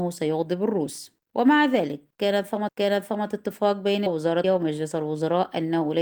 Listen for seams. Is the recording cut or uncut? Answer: cut